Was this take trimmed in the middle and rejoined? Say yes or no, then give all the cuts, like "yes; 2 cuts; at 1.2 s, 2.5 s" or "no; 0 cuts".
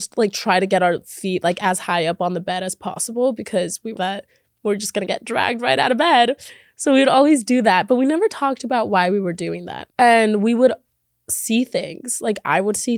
yes; 2 cuts; at 4.0 s, 9.9 s